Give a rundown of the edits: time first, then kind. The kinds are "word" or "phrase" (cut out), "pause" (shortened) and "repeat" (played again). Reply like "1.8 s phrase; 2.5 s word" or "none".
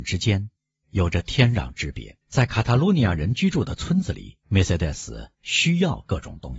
2.2 s pause; 4.4 s pause